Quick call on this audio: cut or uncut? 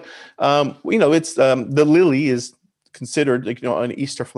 uncut